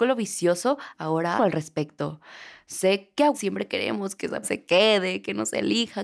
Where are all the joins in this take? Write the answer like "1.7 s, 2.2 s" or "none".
0.9 s, 1.4 s, 3.3 s, 4.4 s